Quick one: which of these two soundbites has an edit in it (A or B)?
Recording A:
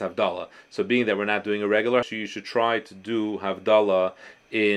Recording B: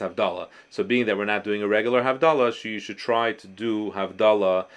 A